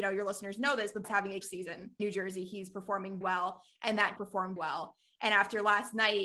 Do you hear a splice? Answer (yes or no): yes